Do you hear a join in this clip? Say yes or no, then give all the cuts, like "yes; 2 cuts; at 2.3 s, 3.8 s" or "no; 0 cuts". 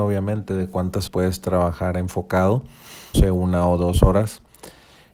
yes; 2 cuts; at 1.1 s, 3.1 s